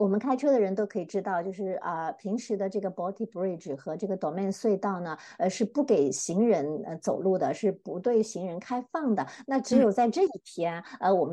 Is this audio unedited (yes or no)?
yes